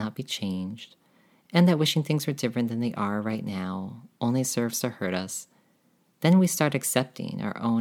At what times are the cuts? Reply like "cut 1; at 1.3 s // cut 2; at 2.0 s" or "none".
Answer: none